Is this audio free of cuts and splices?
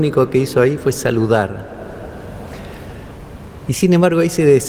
yes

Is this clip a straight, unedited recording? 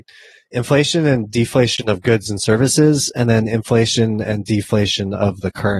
yes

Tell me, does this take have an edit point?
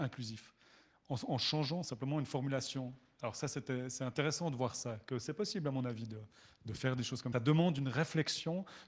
yes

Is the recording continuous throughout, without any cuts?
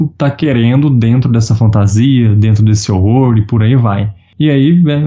yes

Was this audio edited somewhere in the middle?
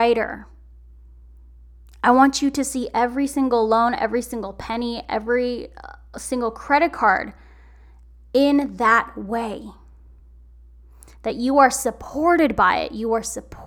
no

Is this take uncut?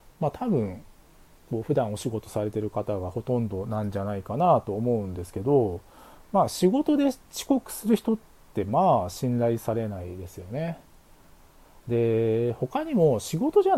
yes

